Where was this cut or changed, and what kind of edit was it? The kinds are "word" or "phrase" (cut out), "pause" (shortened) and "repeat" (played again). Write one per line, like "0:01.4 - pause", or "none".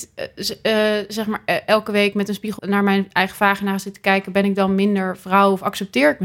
0:02.6 - word